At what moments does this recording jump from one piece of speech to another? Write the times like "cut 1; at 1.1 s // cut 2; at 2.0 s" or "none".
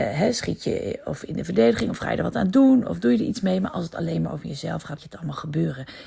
cut 1; at 5.0 s

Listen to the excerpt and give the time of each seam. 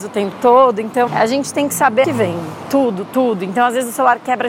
cut 1; at 1.1 s // cut 2; at 2.0 s

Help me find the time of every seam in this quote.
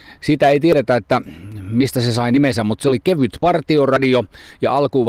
none

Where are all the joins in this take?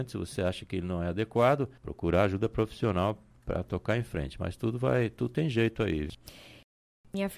cut 1; at 1.8 s

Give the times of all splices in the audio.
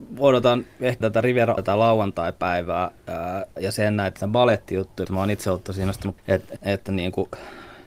cut 1; at 1.0 s // cut 2; at 1.6 s // cut 3; at 3.6 s // cut 4; at 4.2 s // cut 5; at 5.1 s // cut 6; at 6.2 s // cut 7; at 6.6 s

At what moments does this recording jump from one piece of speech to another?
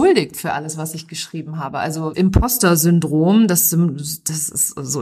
cut 1; at 2.1 s

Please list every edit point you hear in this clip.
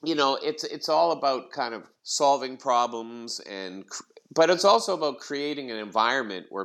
cut 1; at 2.0 s

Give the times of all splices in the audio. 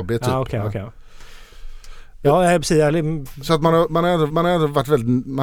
cut 1; at 4.3 s

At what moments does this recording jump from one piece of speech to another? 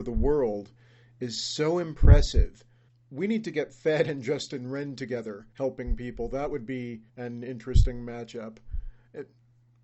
cut 1; at 2.9 s // cut 2; at 5.5 s // cut 3; at 7.1 s

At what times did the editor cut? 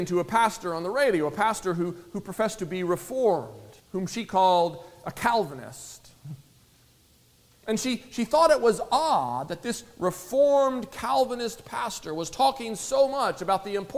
cut 1; at 3.8 s

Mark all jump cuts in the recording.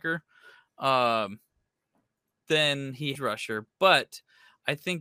cut 1; at 3.1 s

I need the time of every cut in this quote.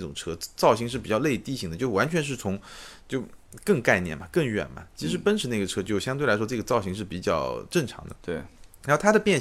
cut 1; at 8.2 s

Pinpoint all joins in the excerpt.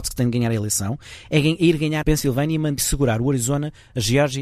cut 1; at 2.0 s // cut 2; at 2.8 s

